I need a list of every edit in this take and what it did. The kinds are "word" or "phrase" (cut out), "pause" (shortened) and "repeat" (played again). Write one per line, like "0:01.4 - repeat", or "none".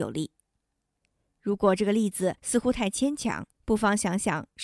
0:02.4 - pause
0:03.5 - pause